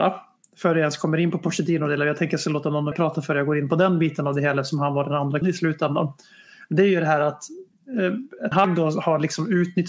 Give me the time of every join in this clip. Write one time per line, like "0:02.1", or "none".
0:02.9
0:05.4
0:08.5